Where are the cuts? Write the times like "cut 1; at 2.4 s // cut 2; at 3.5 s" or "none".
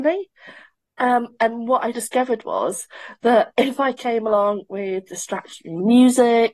cut 1; at 1.9 s